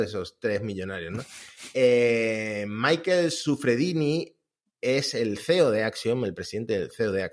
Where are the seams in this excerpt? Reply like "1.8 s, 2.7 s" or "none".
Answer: none